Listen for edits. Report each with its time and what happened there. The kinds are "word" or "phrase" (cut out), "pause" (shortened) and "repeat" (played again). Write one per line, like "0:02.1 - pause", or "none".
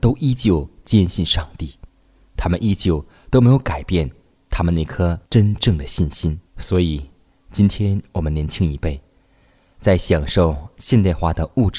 0:05.3 - pause
0:06.5 - pause